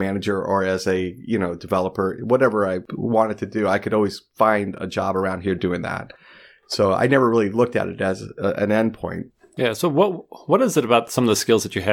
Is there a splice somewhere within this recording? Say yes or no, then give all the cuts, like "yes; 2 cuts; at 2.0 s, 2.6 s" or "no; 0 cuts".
no; 0 cuts